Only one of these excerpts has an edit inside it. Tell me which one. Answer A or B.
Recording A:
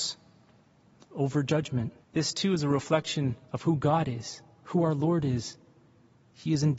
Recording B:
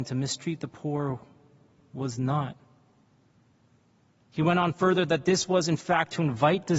A